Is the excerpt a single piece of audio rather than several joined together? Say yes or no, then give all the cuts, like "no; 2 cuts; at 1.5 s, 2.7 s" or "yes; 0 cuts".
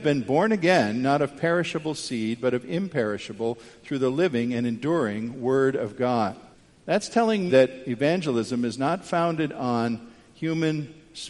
no; 2 cuts; at 6.5 s, 7.5 s